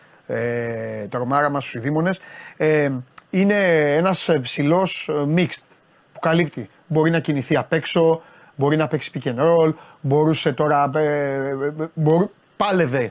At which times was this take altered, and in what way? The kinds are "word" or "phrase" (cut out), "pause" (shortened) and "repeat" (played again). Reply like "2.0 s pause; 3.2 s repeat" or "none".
none